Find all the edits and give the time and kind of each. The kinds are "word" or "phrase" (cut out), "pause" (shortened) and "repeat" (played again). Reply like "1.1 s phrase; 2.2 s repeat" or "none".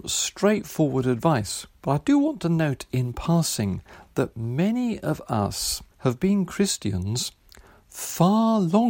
1.7 s pause; 5.9 s pause